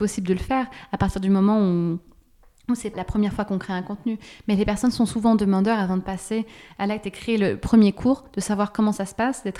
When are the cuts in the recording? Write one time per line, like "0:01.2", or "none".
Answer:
0:02.9